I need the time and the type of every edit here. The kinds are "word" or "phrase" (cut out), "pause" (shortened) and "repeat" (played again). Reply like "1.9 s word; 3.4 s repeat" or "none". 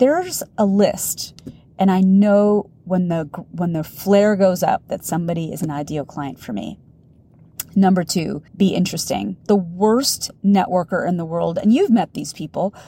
2.8 s pause; 8.5 s pause; 9.4 s pause